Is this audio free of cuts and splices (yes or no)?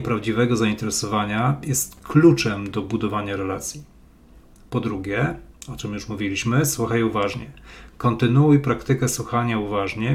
yes